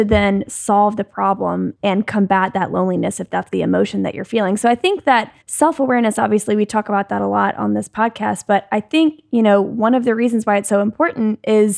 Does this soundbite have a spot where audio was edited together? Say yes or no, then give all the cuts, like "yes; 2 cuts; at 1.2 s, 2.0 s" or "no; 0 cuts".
yes; 1 cut; at 5.4 s